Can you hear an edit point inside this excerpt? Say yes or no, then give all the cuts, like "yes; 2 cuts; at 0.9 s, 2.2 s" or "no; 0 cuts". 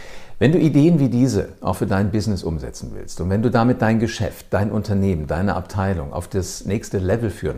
no; 0 cuts